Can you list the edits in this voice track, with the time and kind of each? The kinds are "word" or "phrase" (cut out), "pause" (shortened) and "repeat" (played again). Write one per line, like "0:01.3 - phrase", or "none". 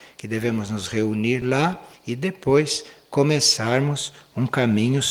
none